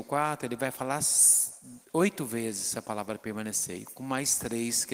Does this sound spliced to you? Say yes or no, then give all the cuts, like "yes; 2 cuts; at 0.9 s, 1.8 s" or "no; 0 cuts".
no; 0 cuts